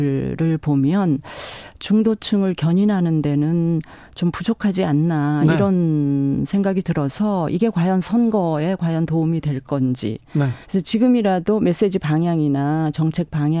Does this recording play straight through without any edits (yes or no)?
no